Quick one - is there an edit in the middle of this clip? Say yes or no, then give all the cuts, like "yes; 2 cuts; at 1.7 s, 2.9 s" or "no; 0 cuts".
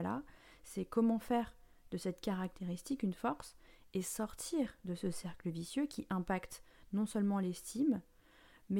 no; 0 cuts